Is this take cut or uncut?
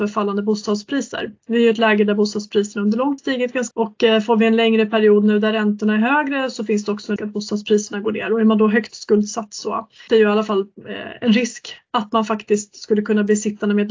cut